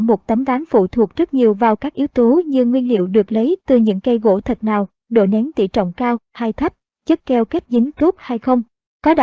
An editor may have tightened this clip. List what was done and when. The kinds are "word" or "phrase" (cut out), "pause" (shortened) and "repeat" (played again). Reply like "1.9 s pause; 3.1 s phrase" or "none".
7.9 s word

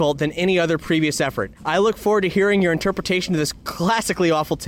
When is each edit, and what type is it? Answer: 1.6 s pause

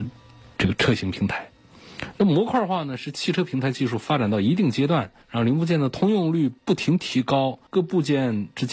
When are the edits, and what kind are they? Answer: 5.2 s pause; 6.6 s pause; 7.7 s pause

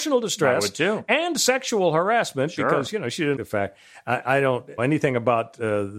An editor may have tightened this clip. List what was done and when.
3.4 s word; 4.8 s word

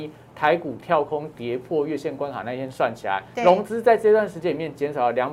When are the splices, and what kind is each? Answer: 3.3 s pause

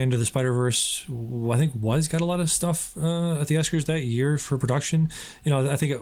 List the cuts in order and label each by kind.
none

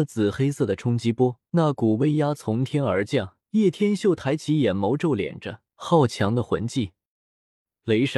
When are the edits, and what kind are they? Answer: 1.5 s pause; 3.4 s pause; 5.7 s pause

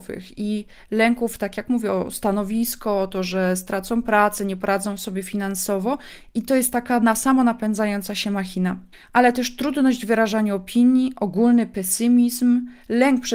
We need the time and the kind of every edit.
8.9 s pause

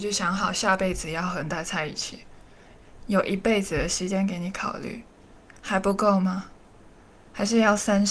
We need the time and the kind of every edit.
none

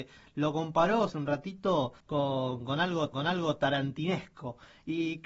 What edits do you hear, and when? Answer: 1.1 s phrase; 2.0 s pause; 3.1 s repeat

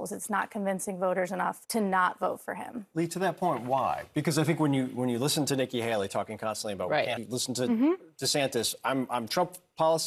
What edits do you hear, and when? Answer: 1.6 s pause; 7.2 s phrase

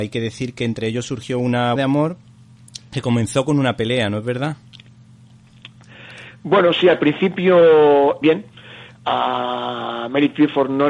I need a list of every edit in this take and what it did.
1.8 s phrase; 8.2 s phrase

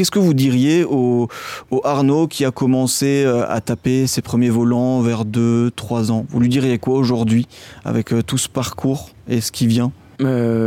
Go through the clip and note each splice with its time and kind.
none

